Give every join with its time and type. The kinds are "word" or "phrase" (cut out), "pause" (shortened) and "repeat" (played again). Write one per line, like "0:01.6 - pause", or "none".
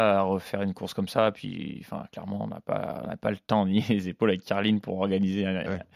none